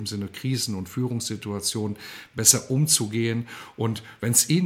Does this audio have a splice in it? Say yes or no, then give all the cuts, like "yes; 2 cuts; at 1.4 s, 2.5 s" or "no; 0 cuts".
no; 0 cuts